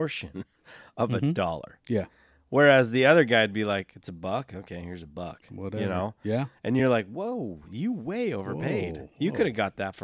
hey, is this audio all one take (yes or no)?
yes